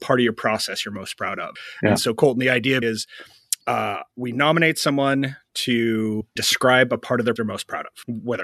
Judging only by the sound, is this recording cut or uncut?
cut